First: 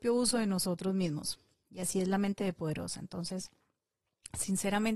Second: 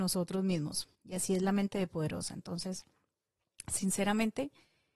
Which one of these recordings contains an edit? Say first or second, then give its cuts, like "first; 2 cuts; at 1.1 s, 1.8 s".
second; 1 cut; at 0.9 s